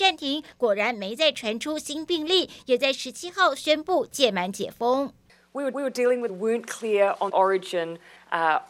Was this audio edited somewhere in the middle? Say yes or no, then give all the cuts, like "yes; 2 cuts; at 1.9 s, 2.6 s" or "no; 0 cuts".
yes; 3 cuts; at 5.7 s, 6.3 s, 7.3 s